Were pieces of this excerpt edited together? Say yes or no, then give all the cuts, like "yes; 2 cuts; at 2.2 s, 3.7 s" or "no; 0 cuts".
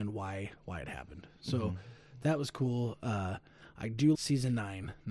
yes; 1 cut; at 4.1 s